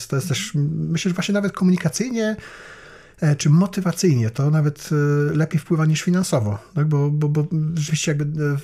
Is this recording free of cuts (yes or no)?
yes